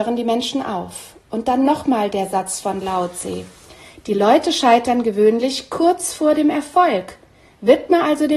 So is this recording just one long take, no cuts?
yes; 0 cuts

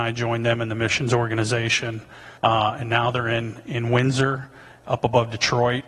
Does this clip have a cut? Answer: yes; 1 cut; at 2.4 s

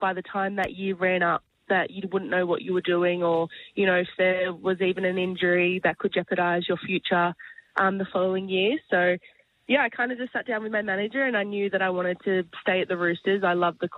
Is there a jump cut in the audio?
no; 0 cuts

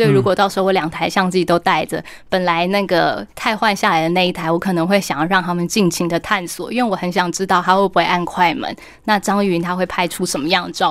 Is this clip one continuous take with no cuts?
no; 1 cut; at 3.3 s

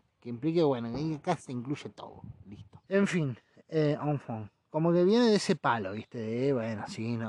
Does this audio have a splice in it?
yes; 1 cut; at 2.8 s

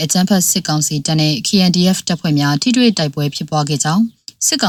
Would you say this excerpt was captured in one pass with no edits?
yes; 0 cuts

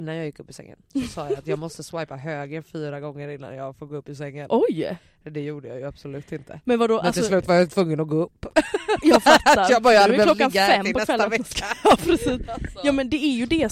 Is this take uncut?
yes; 0 cuts

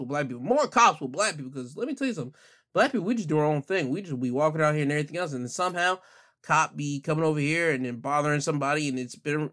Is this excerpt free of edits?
yes; 0 cuts

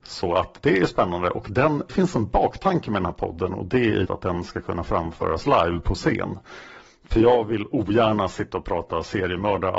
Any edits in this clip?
yes; 2 cuts; at 1.9 s, 4.0 s

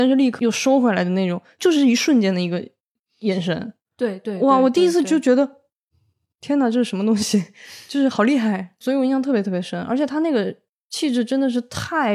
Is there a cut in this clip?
no; 0 cuts

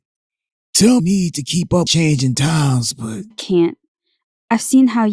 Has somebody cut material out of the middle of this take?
yes; 3 cuts; at 1.0 s, 1.9 s, 3.3 s

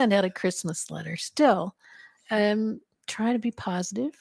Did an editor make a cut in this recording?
no; 0 cuts

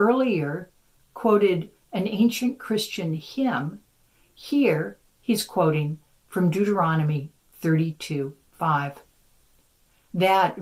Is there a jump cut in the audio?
no; 0 cuts

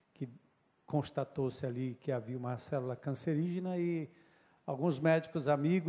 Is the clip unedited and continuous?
yes; 0 cuts

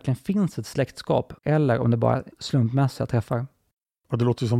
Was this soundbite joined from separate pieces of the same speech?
yes; 2 cuts; at 1.4 s, 2.3 s

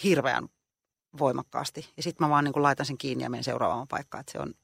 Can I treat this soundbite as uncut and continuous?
yes; 0 cuts

